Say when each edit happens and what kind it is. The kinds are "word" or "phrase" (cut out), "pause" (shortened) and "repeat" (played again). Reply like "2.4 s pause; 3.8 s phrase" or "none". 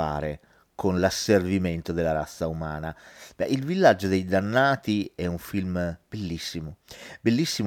none